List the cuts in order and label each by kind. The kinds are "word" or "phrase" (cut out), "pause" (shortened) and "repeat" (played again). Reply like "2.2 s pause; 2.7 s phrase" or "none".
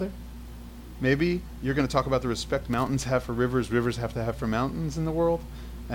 none